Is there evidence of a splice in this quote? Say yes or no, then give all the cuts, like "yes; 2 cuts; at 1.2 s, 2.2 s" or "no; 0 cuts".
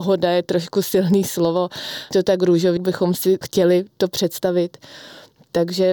yes; 3 cuts; at 2.1 s, 2.8 s, 3.4 s